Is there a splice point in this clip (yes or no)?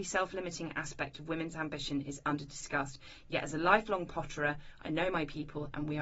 no